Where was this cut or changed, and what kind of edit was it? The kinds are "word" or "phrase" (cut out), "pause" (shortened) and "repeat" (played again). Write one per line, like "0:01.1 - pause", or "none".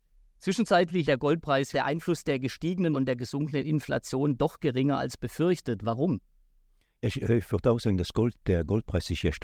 0:01.0 - word
0:01.7 - phrase
0:02.9 - word